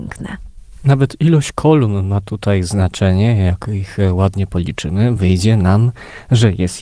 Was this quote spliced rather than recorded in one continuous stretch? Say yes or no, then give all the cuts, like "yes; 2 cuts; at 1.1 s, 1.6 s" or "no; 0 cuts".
no; 0 cuts